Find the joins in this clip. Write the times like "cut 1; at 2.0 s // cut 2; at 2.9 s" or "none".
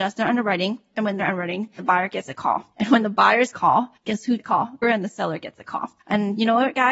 cut 1; at 1.2 s // cut 2; at 1.8 s // cut 3; at 2.7 s // cut 4; at 3.5 s // cut 5; at 4.0 s // cut 6; at 4.4 s // cut 7; at 4.8 s // cut 8; at 6.0 s